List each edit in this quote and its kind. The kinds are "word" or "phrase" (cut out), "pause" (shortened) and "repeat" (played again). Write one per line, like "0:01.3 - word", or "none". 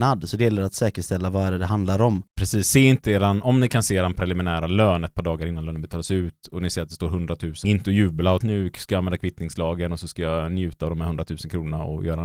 0:02.3 - pause
0:07.6 - phrase
0:08.4 - phrase